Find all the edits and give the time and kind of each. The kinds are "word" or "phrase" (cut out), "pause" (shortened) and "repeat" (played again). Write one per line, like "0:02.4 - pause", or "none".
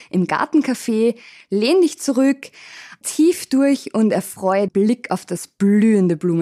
0:03.0 - word
0:04.7 - phrase